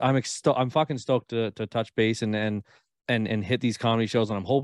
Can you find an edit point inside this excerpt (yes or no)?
no